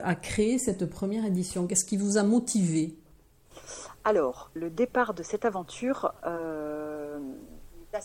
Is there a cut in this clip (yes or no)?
yes